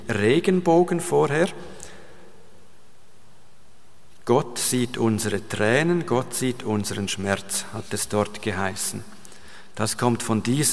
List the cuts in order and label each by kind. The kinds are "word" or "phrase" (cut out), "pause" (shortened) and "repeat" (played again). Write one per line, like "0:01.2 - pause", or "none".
none